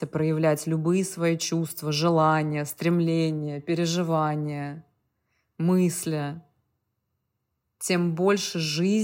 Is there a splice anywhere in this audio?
no; 0 cuts

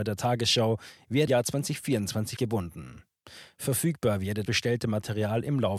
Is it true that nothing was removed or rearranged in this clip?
no; 3 cuts; at 1.3 s, 2.4 s, 4.5 s

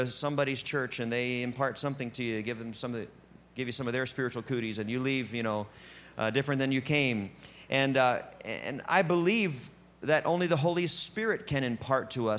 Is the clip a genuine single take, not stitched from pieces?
yes; 0 cuts

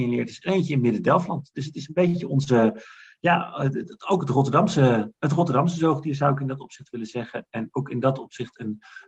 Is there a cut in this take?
no; 0 cuts

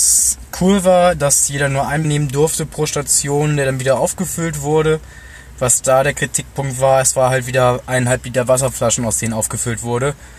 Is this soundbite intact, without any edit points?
no; 1 cut; at 2.0 s

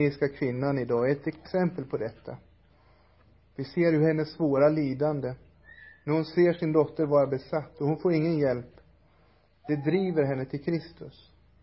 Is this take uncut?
yes; 0 cuts

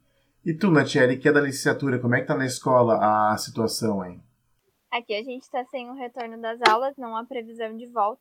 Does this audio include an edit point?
no; 0 cuts

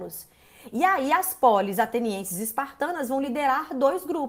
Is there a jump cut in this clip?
no; 0 cuts

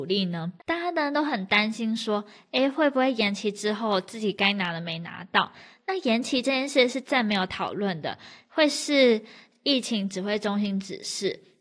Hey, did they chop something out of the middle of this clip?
no; 0 cuts

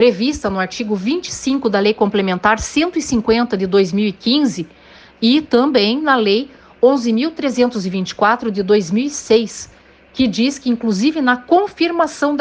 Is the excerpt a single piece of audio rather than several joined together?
yes; 0 cuts

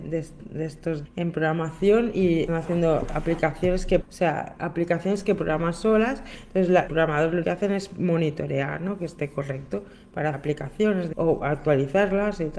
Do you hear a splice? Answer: yes; 8 cuts; at 1.0 s, 2.5 s, 4.0 s, 4.6 s, 6.9 s, 7.4 s, 10.3 s, 11.1 s

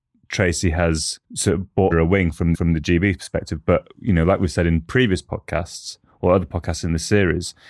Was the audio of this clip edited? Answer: yes; 3 cuts; at 1.2 s, 1.9 s, 2.5 s

